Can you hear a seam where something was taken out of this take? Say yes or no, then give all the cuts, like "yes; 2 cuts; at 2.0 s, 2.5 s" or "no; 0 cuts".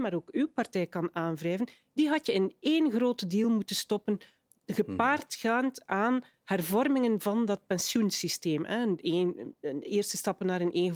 no; 0 cuts